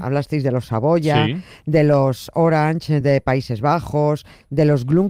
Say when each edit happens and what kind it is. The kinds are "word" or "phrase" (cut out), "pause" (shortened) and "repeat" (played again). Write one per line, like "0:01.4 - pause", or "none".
none